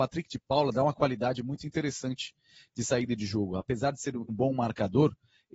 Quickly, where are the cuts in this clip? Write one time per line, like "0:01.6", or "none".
0:04.3